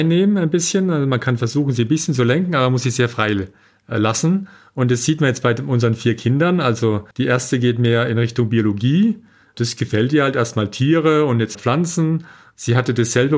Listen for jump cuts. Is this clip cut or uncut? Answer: cut